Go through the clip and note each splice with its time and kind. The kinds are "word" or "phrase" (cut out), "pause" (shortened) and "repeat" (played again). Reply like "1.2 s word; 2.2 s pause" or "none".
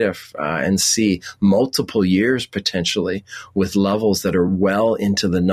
none